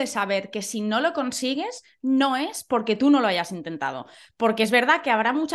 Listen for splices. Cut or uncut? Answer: uncut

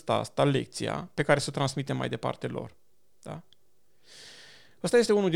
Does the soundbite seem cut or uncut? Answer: uncut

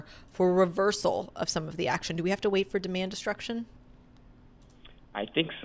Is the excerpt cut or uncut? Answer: uncut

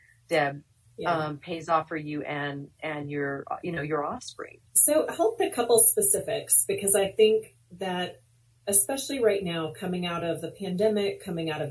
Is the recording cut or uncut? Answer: cut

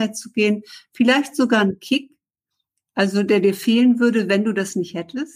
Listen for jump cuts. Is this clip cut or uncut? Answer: uncut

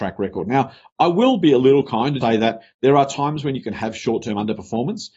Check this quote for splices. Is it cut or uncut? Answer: cut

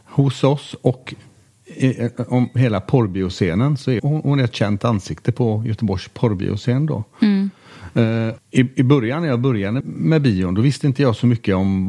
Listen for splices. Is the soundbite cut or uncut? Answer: cut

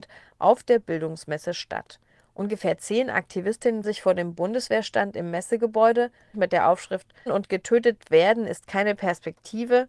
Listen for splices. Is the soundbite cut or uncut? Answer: cut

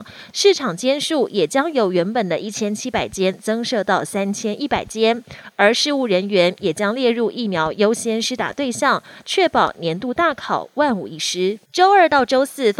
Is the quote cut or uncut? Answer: cut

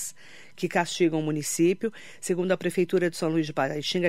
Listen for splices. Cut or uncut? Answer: uncut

